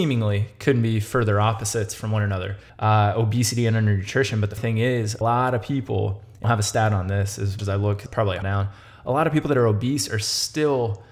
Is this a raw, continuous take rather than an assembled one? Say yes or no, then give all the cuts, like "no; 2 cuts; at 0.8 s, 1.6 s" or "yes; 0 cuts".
no; 7 cuts; at 2.7 s, 4.6 s, 5.2 s, 6.4 s, 7.6 s, 8.1 s, 8.4 s